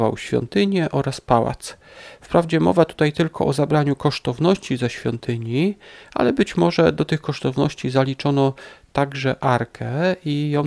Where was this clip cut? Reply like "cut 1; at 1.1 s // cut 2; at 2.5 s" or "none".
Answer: none